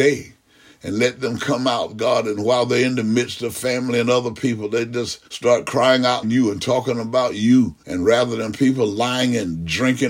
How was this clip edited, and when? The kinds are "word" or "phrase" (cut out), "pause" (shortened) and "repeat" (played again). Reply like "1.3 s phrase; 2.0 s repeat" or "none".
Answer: 5.3 s pause; 6.2 s phrase; 7.8 s pause

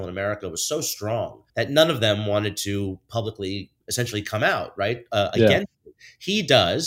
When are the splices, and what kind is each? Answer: 1.5 s pause; 3.8 s pause

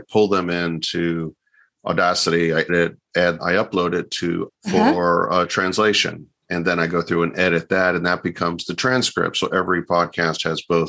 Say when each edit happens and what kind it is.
2.7 s word; 3.4 s phrase; 4.5 s word

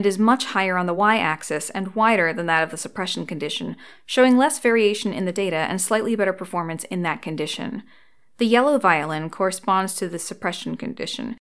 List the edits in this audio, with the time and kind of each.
none

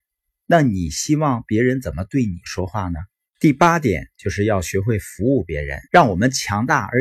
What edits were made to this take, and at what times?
3.1 s pause; 5.8 s pause

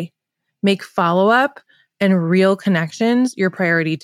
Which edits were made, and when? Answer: none

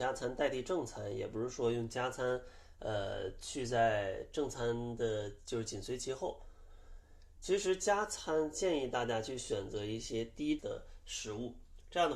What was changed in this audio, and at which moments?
10.6 s word

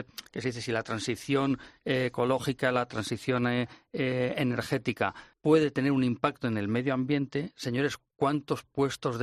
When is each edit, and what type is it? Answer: 5.3 s pause

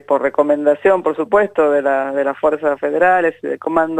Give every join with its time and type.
none

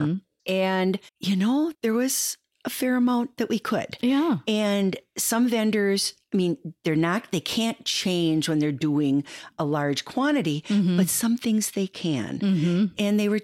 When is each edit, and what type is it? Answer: 1.1 s pause; 1.7 s pause

